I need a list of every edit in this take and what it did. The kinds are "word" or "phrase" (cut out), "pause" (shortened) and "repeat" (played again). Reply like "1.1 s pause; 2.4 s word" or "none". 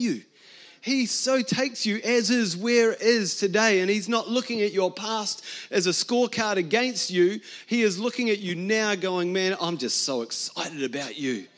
none

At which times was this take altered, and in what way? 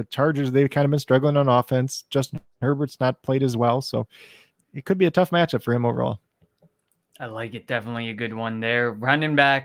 none

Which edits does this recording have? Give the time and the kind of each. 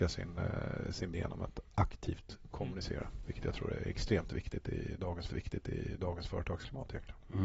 1.1 s word; 5.3 s repeat

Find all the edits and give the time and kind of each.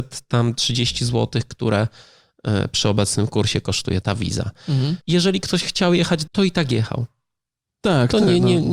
4.0 s word; 5.0 s pause; 6.3 s phrase

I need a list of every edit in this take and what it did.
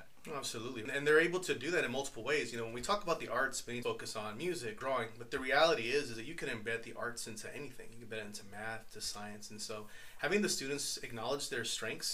3.8 s phrase

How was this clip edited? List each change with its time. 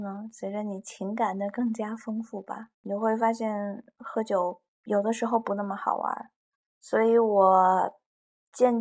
2.7 s pause; 4.7 s pause; 6.5 s pause

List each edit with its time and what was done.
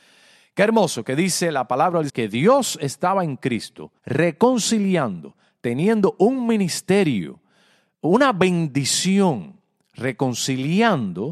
2.1 s word; 4.0 s pause

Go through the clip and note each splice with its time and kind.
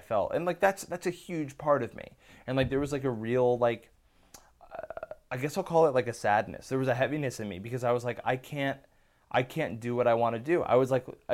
none

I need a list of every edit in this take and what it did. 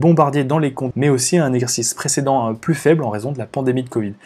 0.9 s word

